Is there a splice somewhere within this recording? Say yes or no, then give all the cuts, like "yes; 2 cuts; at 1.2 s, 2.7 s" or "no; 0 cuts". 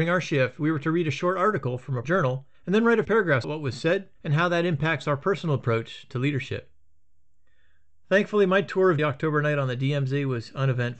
yes; 6 cuts; at 2.0 s, 2.5 s, 3.0 s, 3.4 s, 4.2 s, 9.0 s